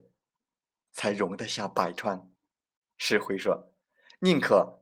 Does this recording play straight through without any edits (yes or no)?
no